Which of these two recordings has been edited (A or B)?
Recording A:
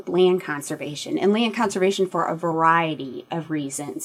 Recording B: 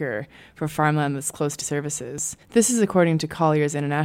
B